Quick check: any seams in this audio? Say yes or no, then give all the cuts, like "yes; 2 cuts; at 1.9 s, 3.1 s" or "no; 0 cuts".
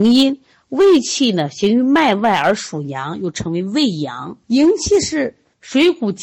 yes; 1 cut; at 4.4 s